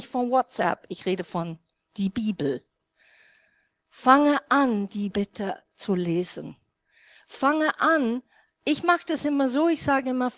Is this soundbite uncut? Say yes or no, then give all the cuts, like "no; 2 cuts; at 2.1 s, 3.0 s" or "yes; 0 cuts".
no; 1 cut; at 5.1 s